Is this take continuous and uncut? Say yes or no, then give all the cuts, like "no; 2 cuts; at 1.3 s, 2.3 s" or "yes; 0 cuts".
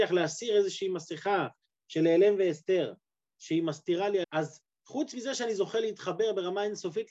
no; 1 cut; at 4.2 s